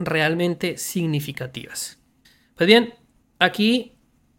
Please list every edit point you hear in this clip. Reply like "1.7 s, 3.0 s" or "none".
2.2 s, 3.2 s